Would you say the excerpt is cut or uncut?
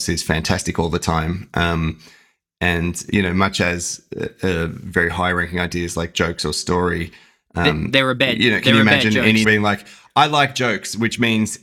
cut